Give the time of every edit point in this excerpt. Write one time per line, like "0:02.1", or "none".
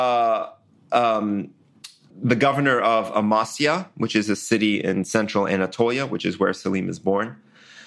0:02.1

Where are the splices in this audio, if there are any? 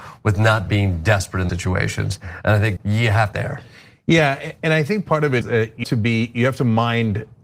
0:01.5
0:02.8
0:03.3
0:05.4
0:05.8

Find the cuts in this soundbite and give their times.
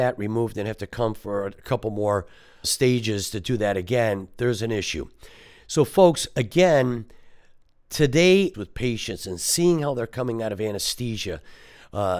0:02.6
0:08.5

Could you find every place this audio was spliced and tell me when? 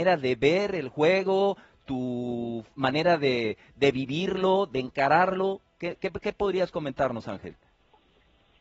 none

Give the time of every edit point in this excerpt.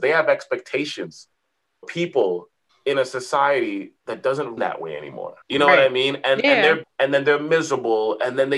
0:01.8
0:02.7
0:04.0
0:04.6
0:05.4
0:06.8

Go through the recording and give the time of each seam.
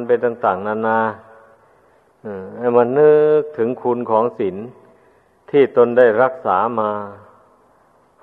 none

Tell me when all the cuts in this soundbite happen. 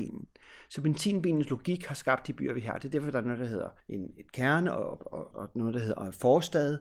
0:03.8
0:05.3

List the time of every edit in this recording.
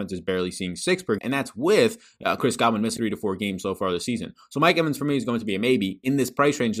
0:01.2
0:03.0

